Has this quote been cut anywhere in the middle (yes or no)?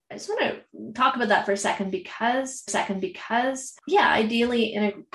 yes